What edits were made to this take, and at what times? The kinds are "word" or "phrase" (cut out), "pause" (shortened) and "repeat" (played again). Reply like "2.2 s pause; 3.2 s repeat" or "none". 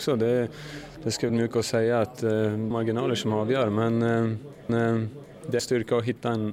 1.3 s word; 2.7 s phrase; 4.7 s repeat; 5.6 s phrase